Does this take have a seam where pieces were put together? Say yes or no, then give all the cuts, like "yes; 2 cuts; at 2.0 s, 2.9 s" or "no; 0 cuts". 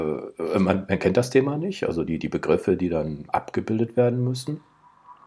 no; 0 cuts